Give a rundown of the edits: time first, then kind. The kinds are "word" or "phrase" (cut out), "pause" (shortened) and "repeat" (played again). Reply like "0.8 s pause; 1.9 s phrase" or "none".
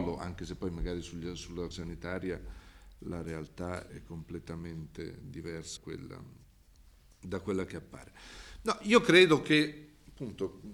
1.7 s word; 3.9 s word; 5.8 s word